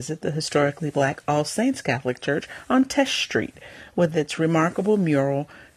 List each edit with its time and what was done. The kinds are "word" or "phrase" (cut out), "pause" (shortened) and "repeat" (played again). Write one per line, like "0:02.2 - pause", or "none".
none